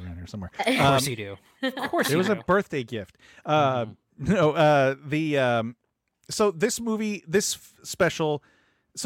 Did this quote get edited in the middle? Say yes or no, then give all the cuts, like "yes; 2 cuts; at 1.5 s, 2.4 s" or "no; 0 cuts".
no; 0 cuts